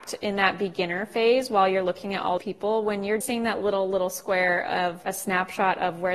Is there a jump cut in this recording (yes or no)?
yes